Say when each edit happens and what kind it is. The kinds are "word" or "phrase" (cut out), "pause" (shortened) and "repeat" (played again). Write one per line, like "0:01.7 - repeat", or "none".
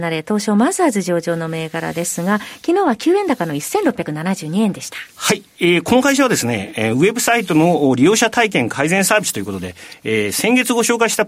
none